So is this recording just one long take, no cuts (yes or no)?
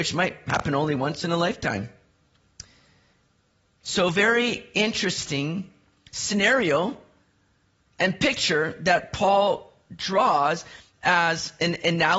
yes